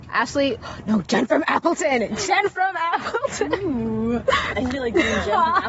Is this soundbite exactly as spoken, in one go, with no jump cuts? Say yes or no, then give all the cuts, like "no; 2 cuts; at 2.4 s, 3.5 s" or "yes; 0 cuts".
yes; 0 cuts